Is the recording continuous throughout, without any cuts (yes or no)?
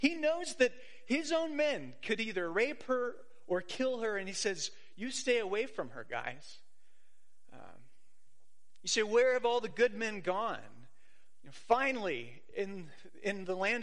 yes